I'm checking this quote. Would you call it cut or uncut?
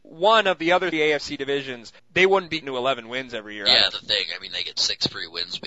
cut